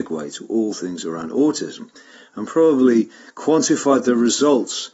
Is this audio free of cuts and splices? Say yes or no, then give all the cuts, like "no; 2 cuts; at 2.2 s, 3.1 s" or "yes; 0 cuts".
yes; 0 cuts